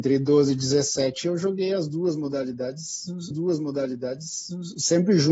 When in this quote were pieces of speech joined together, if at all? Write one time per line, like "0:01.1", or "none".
0:03.3

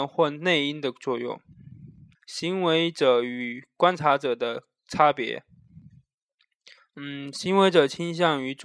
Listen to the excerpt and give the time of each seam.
0:02.1
0:06.8

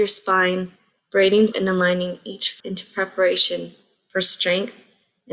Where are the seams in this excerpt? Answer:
0:01.5
0:02.6

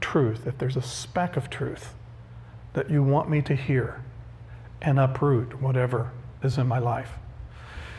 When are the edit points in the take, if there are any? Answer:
none

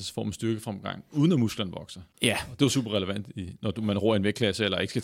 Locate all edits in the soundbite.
0:02.1

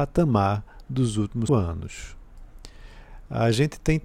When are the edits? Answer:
0:01.5

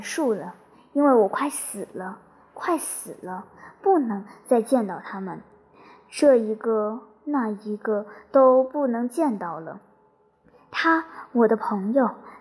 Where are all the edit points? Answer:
none

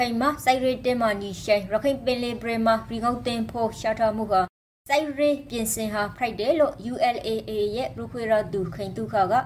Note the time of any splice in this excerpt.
none

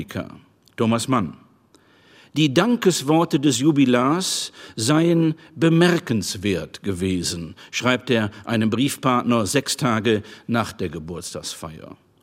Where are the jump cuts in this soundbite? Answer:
none

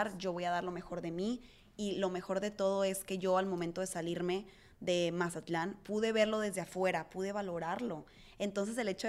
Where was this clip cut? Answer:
none

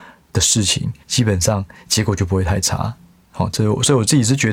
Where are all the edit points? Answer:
0:01.0

